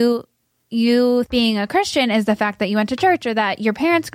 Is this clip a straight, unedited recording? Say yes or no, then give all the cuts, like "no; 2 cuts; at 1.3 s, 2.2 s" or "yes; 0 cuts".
no; 1 cut; at 1.3 s